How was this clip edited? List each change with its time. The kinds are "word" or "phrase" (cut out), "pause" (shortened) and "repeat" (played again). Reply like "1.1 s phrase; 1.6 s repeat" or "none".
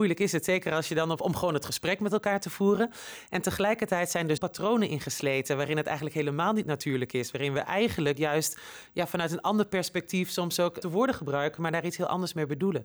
1.2 s phrase; 4.4 s word; 10.8 s word